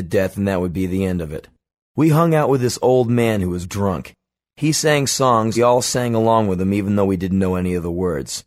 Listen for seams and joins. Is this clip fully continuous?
no; 2 cuts; at 3.6 s, 5.6 s

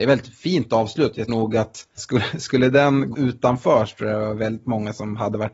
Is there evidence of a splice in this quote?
yes; 3 cuts; at 1.3 s, 2.0 s, 3.1 s

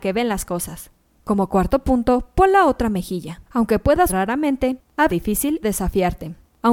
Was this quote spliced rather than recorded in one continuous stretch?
yes; 5 cuts; at 1.0 s, 3.5 s, 4.1 s, 5.1 s, 5.6 s

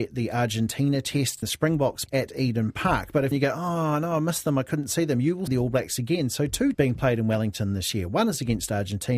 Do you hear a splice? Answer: yes; 5 cuts; at 1.4 s, 2.1 s, 3.3 s, 5.5 s, 6.7 s

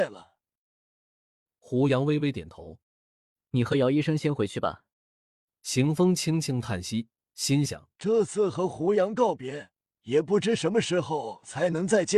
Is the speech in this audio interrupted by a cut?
yes; 4 cuts; at 2.8 s, 4.9 s, 7.9 s, 9.8 s

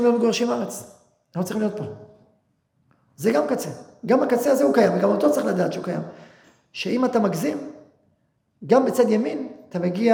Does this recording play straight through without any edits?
yes; 0 cuts

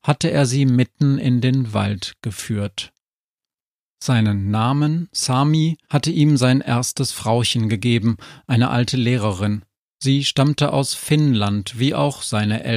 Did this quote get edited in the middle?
yes; 1 cut; at 5.8 s

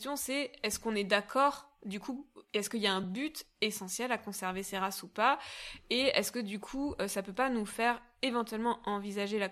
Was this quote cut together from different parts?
no; 0 cuts

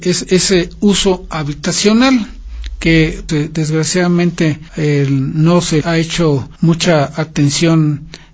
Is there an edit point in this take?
yes; 4 cuts; at 3.3 s, 4.7 s, 5.8 s, 6.6 s

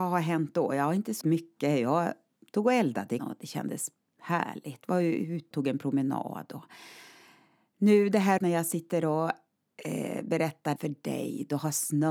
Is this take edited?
yes; 5 cuts; at 1.2 s, 3.2 s, 5.5 s, 8.4 s, 10.8 s

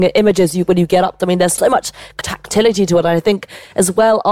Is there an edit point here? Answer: yes; 3 cuts; at 1.2 s, 1.6 s, 2.2 s

